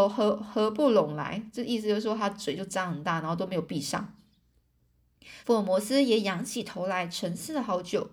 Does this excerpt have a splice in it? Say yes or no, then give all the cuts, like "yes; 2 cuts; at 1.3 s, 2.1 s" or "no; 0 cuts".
yes; 1 cut; at 5.4 s